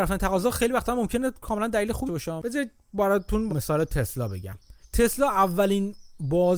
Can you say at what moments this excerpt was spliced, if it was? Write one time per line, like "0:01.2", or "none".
0:02.1
0:03.5
0:04.8